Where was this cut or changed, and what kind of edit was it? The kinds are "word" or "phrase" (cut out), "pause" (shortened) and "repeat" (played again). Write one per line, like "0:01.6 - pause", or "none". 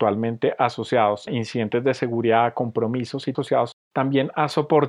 0:01.3 - word
0:03.3 - word
0:03.8 - pause